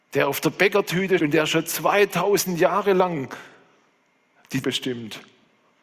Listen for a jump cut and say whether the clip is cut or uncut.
cut